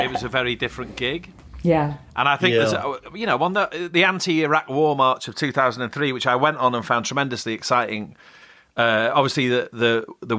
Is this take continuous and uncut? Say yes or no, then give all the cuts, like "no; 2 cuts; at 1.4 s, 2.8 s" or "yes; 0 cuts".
yes; 0 cuts